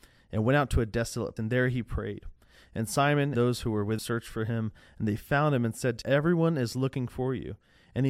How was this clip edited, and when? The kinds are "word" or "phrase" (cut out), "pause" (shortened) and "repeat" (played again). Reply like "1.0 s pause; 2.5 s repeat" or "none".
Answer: 1.4 s word; 3.3 s word; 4.0 s word; 6.0 s word